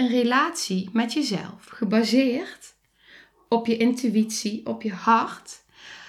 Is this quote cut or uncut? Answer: uncut